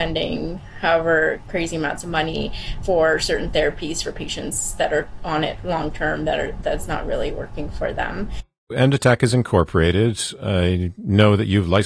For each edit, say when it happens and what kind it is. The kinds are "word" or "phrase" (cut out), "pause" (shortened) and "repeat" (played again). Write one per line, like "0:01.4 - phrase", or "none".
0:02.8 - word